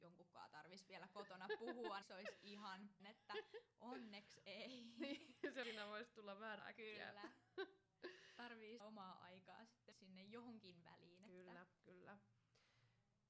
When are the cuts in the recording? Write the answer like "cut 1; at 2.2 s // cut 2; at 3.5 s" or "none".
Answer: cut 1; at 2.0 s // cut 2; at 3.0 s // cut 3; at 5.6 s // cut 4; at 6.6 s // cut 5; at 8.8 s // cut 6; at 9.9 s